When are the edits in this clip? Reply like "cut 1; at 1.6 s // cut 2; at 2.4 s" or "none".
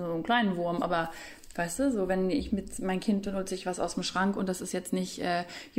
none

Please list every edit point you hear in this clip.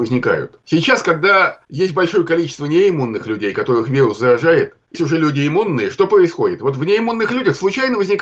cut 1; at 4.9 s

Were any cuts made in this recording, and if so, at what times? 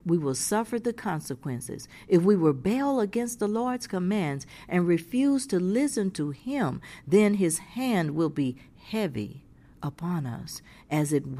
none

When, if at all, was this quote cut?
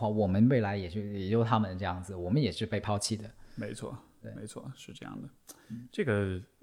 none

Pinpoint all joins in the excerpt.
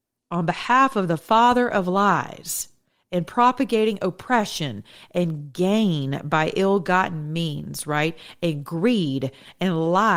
none

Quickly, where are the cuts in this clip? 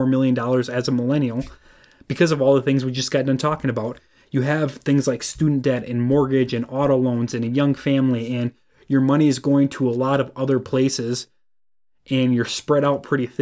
none

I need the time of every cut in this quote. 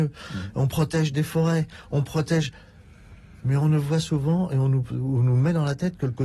none

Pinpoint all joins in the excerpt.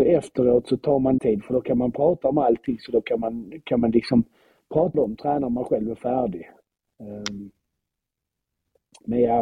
cut 1; at 1.2 s // cut 2; at 4.9 s

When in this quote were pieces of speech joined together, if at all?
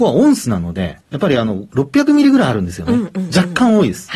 cut 1; at 1.0 s

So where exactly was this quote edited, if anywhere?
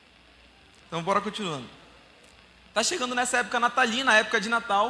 none

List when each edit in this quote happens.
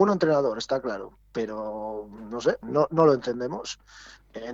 cut 1; at 2.6 s

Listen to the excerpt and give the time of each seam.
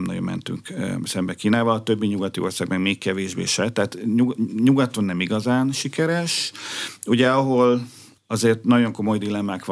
cut 1; at 8.2 s

